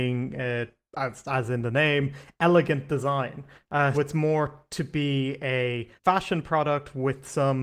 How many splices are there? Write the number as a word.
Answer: two